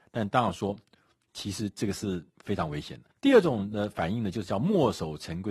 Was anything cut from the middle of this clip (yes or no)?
yes